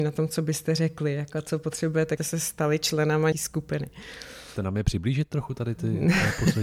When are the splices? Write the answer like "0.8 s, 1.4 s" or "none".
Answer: 2.2 s, 3.3 s, 4.6 s